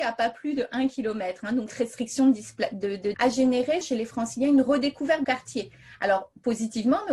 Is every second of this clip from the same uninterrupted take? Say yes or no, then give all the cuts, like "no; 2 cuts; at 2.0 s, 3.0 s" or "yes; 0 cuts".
no; 4 cuts; at 1.7 s, 3.1 s, 3.8 s, 5.2 s